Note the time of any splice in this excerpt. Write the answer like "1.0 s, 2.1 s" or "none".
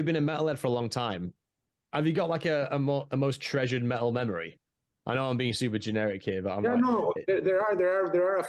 none